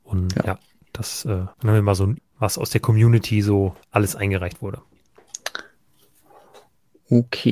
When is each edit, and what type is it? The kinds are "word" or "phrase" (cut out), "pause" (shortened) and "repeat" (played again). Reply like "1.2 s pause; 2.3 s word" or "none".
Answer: 1.5 s pause; 2.2 s word; 3.8 s pause